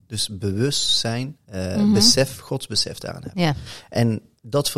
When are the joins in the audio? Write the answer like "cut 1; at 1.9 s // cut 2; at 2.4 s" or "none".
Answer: cut 1; at 1.4 s